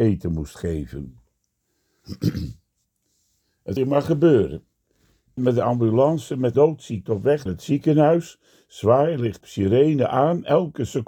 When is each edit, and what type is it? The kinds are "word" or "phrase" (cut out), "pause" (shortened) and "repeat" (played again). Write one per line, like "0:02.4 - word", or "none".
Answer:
0:03.8 - word
0:05.4 - word
0:06.5 - word
0:07.1 - word
0:07.5 - word
0:09.4 - word